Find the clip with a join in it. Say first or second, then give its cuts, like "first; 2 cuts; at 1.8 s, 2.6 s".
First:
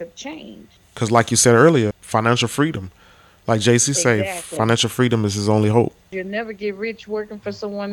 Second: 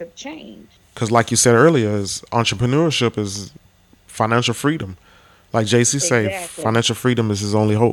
first; 1 cut; at 1.9 s